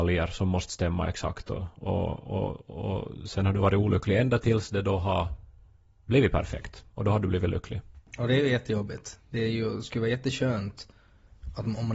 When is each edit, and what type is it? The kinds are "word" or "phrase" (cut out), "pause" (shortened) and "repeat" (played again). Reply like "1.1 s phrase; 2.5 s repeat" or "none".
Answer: none